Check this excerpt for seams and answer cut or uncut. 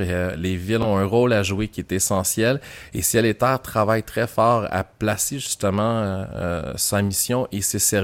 uncut